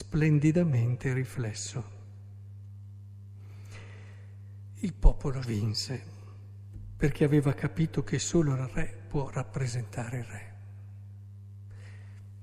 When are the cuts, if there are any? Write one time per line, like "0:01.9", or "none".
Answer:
0:05.4